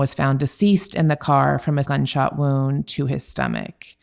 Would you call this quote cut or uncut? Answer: cut